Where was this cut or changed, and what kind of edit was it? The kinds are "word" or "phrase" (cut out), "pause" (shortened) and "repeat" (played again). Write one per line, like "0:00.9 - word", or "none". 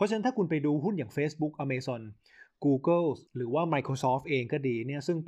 0:03.3 - pause